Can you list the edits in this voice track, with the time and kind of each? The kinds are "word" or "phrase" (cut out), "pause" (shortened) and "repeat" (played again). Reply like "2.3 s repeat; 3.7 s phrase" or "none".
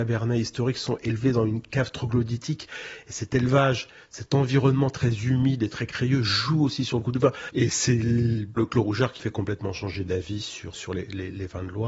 8.6 s word; 9.2 s word; 10.7 s word